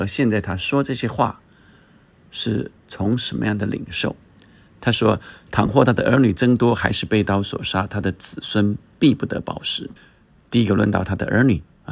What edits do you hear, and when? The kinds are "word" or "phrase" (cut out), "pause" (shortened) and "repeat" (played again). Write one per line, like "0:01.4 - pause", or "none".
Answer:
0:10.0 - pause